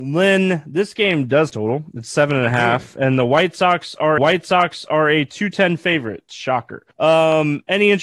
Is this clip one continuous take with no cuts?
no; 3 cuts; at 1.5 s, 4.2 s, 6.9 s

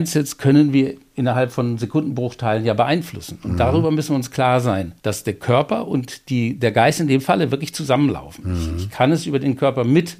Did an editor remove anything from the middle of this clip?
yes; 1 cut; at 5.0 s

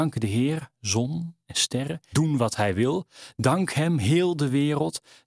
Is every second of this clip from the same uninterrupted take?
no; 2 cuts; at 1.5 s, 2.1 s

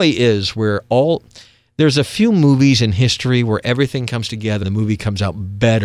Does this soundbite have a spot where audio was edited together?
yes; 1 cut; at 4.6 s

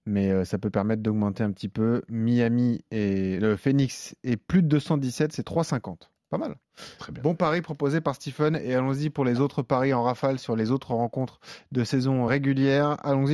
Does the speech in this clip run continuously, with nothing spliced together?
no; 1 cut; at 12.3 s

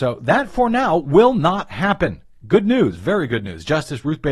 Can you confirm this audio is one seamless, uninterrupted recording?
yes; 0 cuts

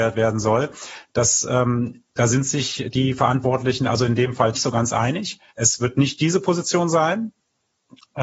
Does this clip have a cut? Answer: yes; 2 cuts; at 4.5 s, 5.5 s

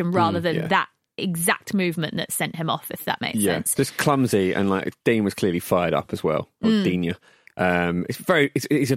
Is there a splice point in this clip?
no; 0 cuts

